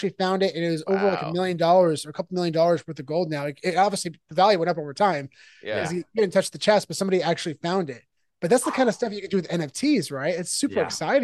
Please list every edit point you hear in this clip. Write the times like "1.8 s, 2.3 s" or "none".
none